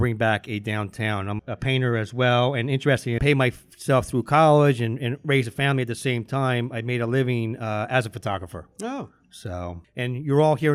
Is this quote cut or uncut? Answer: cut